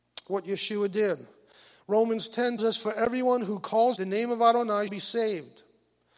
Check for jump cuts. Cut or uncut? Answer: cut